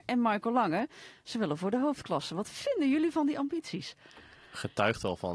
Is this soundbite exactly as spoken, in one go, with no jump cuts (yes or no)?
yes